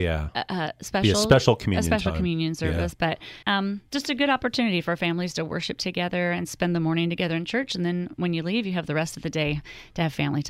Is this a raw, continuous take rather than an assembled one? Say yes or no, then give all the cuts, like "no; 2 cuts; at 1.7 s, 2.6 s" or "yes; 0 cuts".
no; 2 cuts; at 3.4 s, 3.9 s